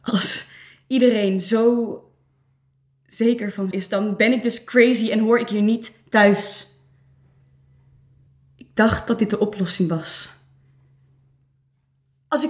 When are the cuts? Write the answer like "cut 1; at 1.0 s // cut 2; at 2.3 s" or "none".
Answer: cut 1; at 3.7 s